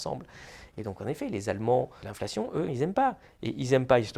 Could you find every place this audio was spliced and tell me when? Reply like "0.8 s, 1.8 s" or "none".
2.0 s, 2.7 s